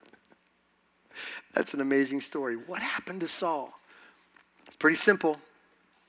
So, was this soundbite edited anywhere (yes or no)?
no